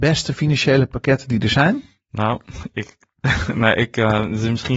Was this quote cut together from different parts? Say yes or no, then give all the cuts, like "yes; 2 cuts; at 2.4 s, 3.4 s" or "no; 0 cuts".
no; 0 cuts